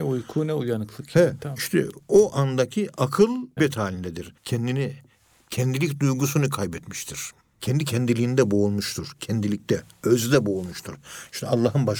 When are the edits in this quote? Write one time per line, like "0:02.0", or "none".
0:03.6
0:04.4
0:07.4